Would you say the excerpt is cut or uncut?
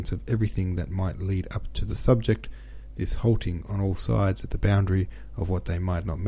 uncut